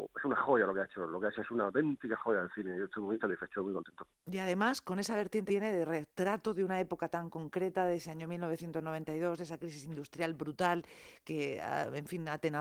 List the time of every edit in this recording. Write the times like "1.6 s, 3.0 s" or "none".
1.4 s, 3.2 s, 5.5 s